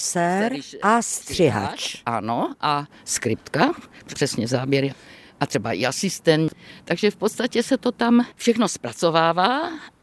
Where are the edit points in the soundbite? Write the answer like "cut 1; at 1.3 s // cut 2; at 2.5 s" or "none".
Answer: cut 1; at 4.1 s